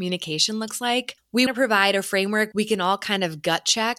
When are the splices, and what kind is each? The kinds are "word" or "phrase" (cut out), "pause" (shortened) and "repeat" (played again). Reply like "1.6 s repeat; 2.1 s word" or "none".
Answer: 1.5 s word; 2.5 s word